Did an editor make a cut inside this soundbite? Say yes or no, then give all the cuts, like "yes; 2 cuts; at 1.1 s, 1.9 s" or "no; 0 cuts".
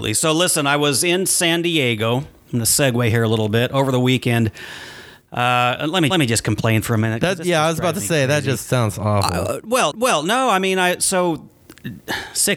yes; 2 cuts; at 6.1 s, 9.9 s